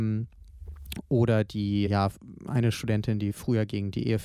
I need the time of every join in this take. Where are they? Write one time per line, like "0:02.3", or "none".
0:01.9